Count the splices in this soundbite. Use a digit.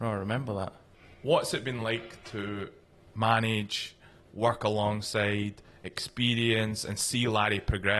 0